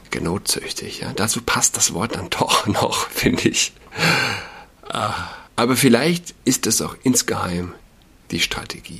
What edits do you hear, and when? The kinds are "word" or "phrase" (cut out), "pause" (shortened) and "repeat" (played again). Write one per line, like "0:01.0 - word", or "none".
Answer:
0:05.5 - pause
0:06.4 - pause

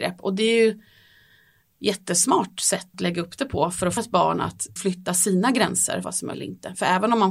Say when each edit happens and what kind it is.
0:02.9 - word
0:04.0 - word
0:04.8 - word
0:06.0 - word
0:06.3 - word

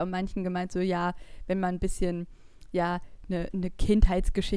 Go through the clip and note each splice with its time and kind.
none

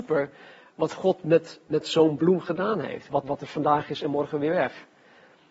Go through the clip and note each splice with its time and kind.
0:03.2 - word

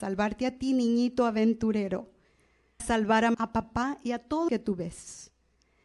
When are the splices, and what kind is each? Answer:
0:02.8 - word
0:03.3 - word
0:04.5 - word

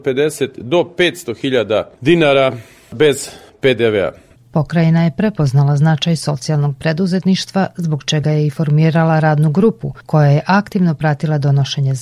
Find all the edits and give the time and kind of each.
none

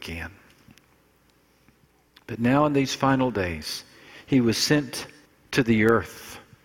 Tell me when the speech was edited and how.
0:05.3 - pause

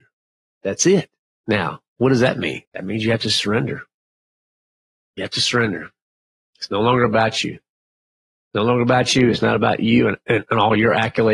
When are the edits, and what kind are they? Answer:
0:01.2 - pause
0:02.6 - pause

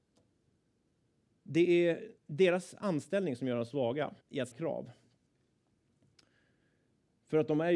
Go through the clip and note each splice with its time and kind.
0:02.2 - pause
0:04.2 - pause
0:04.5 - word

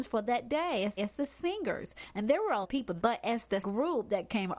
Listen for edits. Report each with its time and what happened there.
0:01.0 - repeat
0:02.6 - word
0:03.0 - word
0:03.6 - word

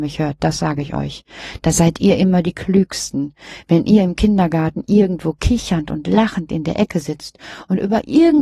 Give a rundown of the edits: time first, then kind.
none

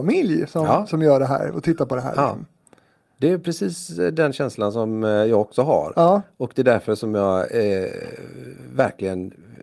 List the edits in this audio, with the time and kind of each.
none

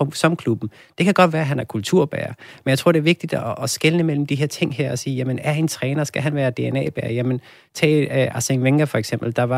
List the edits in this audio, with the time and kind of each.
none

